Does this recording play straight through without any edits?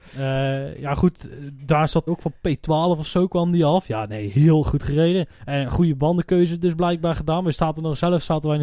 no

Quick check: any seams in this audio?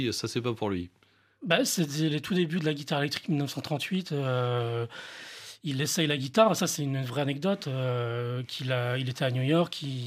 no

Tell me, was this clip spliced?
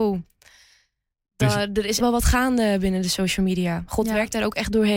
yes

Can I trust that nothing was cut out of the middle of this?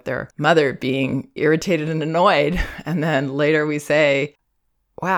no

